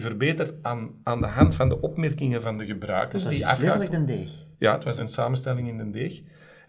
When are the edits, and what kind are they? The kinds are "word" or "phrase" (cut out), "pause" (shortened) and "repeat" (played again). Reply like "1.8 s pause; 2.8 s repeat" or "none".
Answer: 1.0 s pause; 4.5 s pause; 5.0 s word